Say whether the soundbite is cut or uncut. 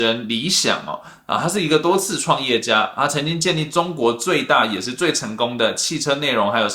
uncut